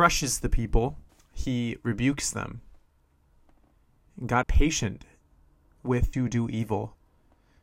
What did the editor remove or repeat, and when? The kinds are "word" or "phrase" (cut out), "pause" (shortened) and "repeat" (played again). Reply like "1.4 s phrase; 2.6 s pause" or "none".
1.1 s pause; 4.4 s word; 6.1 s word